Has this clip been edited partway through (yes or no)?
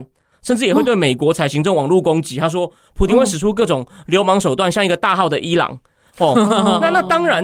no